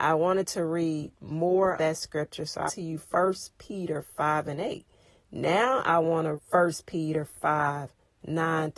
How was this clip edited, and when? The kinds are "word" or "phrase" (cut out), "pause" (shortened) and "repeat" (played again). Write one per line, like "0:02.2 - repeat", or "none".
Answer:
0:01.8 - word
0:02.7 - word
0:06.4 - word